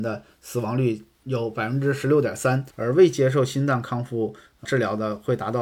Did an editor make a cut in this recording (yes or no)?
yes